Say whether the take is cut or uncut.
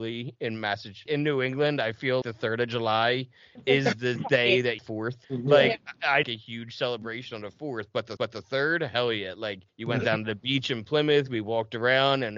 cut